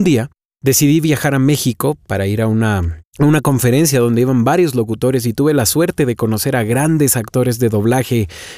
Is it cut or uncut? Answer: cut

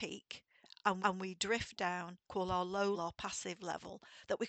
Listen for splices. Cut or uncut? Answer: cut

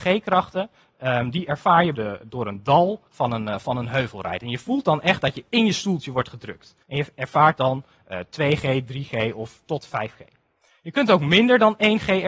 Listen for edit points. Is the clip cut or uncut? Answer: cut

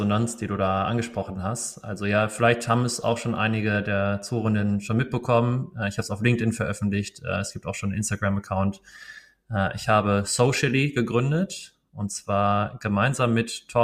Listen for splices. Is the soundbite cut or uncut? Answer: uncut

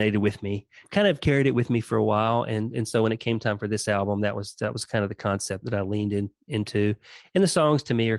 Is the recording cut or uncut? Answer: uncut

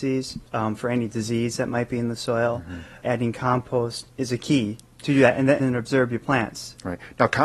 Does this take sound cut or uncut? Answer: cut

